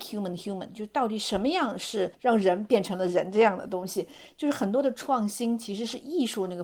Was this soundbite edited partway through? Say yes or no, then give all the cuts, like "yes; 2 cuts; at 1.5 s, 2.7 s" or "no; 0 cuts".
yes; 1 cut; at 2.1 s